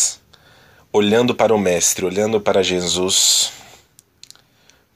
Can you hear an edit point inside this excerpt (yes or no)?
no